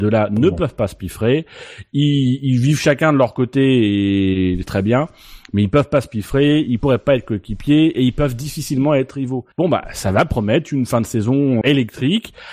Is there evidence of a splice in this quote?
yes; 3 cuts; at 4.6 s, 9.5 s, 11.6 s

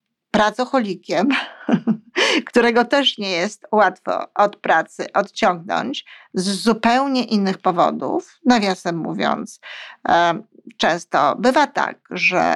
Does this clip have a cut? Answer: no; 0 cuts

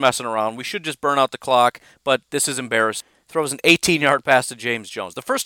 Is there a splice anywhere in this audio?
no; 0 cuts

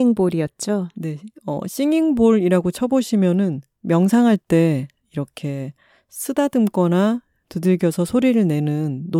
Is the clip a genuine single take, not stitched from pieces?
yes; 0 cuts

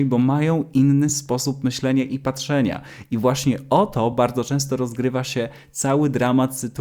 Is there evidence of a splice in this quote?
no; 0 cuts

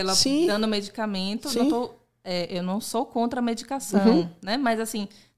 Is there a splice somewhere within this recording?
no; 0 cuts

